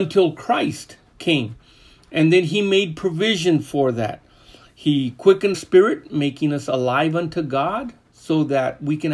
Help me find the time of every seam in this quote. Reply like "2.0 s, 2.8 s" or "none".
5.5 s